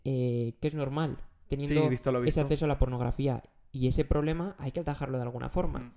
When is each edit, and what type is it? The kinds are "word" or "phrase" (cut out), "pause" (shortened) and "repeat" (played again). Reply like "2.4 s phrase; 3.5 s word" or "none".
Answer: none